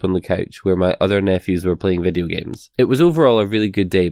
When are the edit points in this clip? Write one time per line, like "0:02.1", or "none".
0:02.7